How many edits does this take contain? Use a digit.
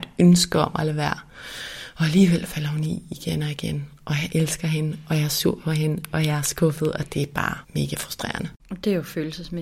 1